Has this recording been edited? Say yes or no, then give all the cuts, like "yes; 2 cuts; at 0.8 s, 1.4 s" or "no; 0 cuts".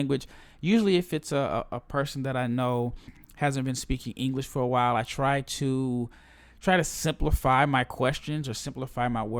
no; 0 cuts